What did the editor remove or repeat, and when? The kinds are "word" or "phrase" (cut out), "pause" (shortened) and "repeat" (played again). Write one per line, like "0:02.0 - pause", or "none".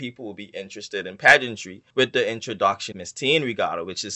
0:01.9 - pause
0:02.9 - word